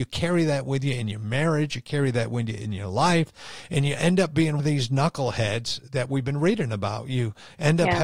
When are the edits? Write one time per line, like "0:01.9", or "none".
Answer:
0:04.6